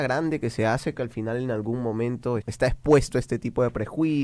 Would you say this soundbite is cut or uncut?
cut